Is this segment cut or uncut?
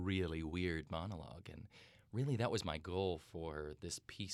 uncut